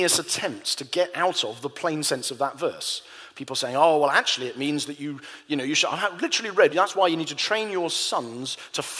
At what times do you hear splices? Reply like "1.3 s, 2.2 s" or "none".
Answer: 6.7 s